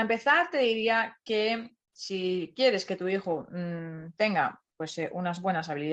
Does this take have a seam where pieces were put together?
yes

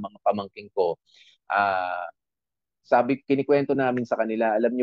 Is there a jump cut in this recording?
no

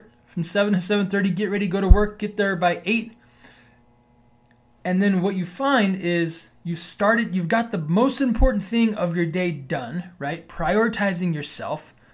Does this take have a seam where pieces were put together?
no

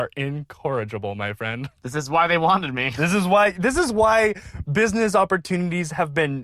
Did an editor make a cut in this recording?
no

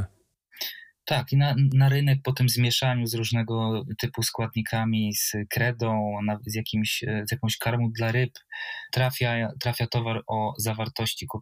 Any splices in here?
no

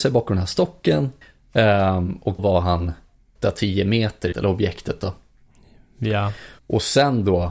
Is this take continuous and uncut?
no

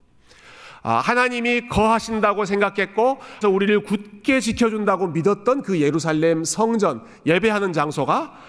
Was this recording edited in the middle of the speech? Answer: yes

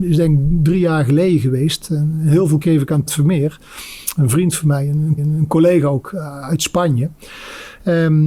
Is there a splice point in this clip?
yes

